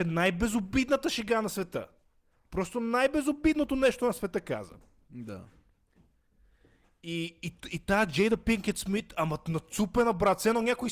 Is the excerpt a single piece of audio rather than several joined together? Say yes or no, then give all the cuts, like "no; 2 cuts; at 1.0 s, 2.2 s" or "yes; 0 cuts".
yes; 0 cuts